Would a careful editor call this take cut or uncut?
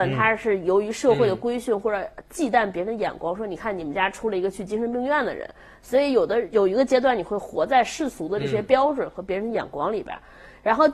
uncut